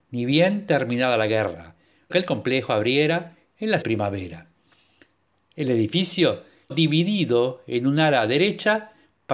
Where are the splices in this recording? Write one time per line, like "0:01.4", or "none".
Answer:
0:02.1
0:03.8
0:06.7